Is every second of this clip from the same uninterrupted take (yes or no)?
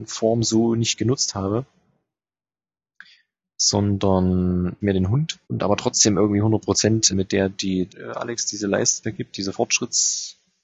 no